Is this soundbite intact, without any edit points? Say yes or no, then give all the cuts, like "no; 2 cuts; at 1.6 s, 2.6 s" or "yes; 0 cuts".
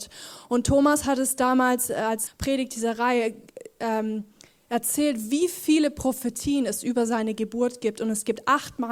no; 1 cut; at 2.3 s